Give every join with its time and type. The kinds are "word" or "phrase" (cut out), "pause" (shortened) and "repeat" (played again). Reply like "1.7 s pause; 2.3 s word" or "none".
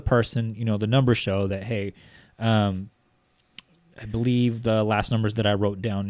none